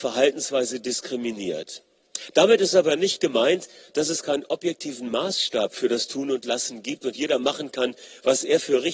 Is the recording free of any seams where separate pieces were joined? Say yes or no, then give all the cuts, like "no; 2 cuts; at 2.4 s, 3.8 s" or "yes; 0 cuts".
yes; 0 cuts